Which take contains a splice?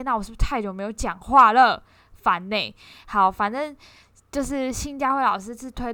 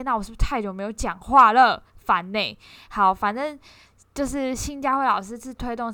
second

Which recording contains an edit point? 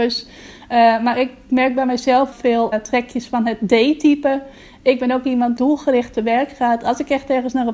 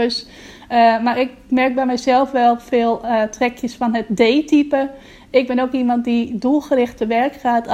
first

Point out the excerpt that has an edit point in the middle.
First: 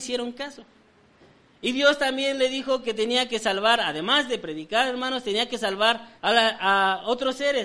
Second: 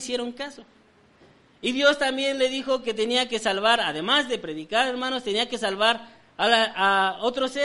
first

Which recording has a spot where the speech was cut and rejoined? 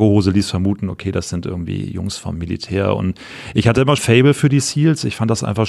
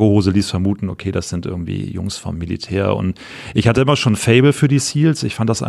first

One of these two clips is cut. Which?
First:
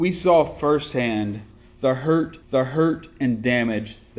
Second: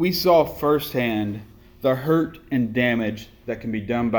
first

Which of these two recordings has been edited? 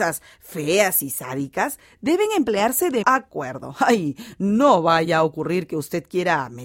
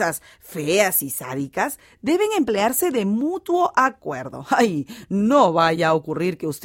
first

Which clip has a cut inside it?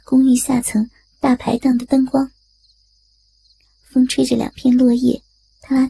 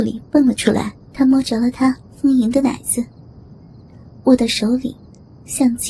second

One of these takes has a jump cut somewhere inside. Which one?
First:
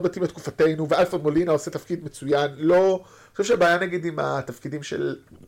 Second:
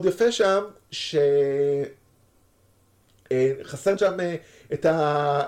second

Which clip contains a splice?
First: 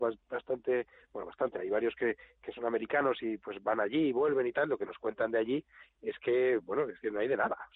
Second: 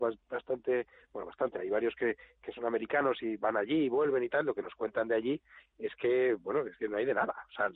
second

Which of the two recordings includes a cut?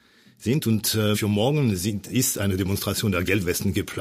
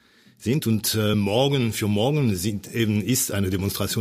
first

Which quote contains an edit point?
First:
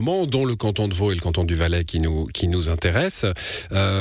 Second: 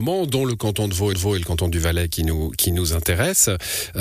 second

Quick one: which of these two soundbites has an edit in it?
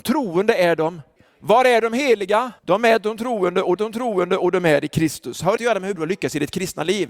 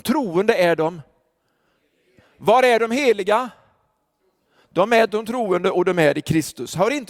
first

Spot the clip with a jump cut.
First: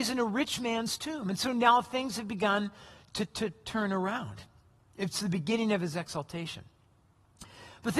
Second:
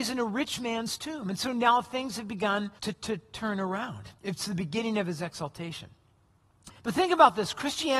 second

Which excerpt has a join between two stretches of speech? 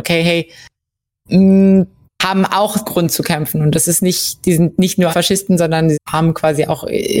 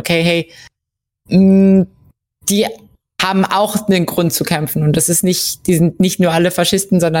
first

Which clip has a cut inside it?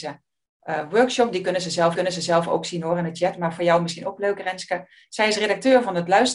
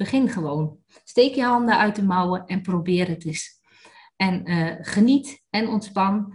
first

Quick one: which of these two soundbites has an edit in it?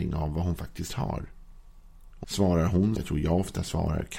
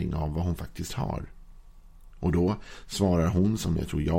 first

